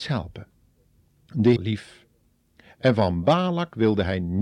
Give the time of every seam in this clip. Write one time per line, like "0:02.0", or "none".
0:01.6